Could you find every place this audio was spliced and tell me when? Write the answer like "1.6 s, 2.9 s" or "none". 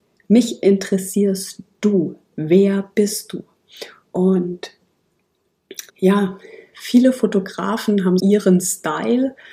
5.9 s, 8.2 s